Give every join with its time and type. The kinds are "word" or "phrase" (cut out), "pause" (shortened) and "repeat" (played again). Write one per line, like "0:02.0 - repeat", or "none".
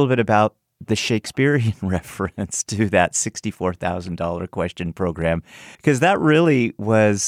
0:05.7 - pause